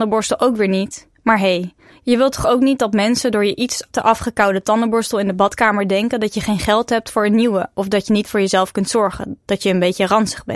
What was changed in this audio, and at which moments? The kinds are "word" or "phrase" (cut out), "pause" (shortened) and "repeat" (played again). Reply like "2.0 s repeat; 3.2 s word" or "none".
none